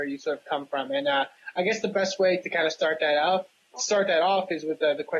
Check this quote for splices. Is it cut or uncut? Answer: uncut